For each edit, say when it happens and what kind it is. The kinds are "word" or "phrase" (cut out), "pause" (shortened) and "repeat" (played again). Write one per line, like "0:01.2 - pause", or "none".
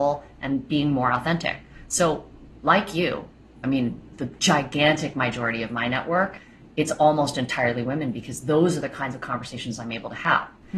none